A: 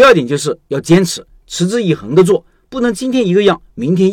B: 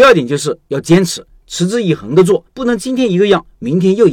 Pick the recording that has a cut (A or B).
B